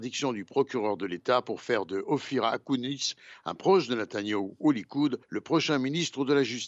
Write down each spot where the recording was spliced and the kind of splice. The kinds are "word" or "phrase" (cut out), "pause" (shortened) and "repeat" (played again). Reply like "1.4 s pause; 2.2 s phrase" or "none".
5.2 s pause